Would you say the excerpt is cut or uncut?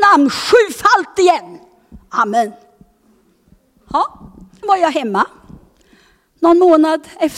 cut